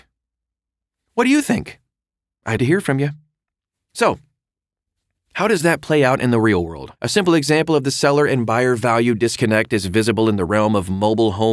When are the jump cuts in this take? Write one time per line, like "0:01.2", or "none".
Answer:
0:02.6
0:07.0

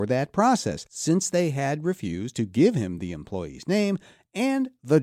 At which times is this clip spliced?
none

